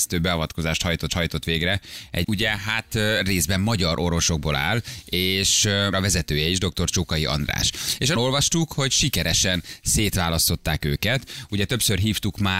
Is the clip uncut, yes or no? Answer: no